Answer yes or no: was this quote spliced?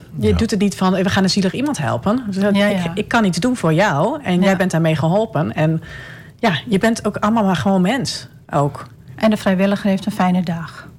no